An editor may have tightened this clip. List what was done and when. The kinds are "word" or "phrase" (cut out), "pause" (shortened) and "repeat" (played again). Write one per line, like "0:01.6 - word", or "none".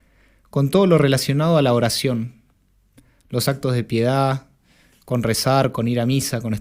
none